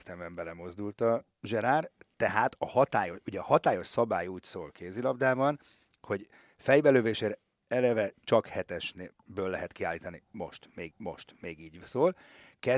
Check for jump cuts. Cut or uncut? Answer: cut